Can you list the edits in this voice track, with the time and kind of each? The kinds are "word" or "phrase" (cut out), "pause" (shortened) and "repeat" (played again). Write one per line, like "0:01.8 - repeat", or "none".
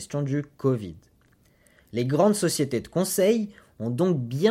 none

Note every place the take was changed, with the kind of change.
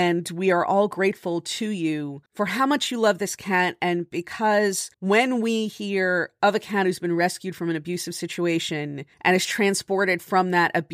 0:02.3 - pause
0:04.9 - pause
0:09.1 - pause

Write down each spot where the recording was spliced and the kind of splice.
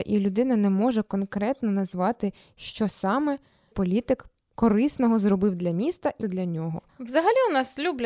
0:03.7 - word
0:06.2 - word

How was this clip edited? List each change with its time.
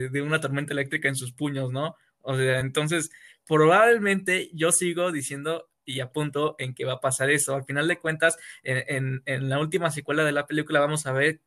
none

